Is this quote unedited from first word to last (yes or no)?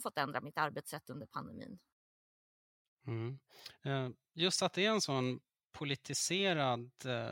yes